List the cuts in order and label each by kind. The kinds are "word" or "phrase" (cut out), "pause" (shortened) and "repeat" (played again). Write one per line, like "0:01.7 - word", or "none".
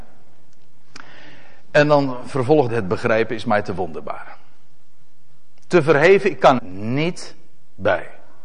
0:02.7 - word
0:06.6 - word